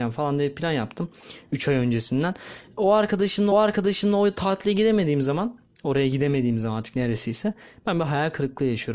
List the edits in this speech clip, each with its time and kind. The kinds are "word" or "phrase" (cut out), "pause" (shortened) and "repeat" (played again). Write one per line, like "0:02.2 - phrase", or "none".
0:03.5 - repeat